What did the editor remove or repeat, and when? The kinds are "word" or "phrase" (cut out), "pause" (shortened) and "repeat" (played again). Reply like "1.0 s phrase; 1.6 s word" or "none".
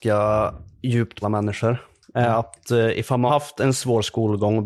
1.2 s word; 3.3 s word